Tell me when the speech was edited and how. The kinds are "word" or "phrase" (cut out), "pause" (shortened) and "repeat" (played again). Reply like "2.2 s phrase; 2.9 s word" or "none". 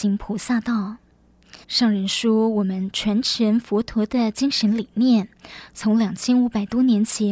1.6 s pause